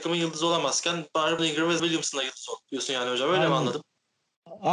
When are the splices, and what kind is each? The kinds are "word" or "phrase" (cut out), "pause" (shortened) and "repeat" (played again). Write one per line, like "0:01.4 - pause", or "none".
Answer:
0:01.4 - word
0:01.8 - word
0:02.6 - pause